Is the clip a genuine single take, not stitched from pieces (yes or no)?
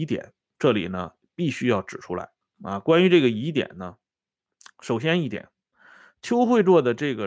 yes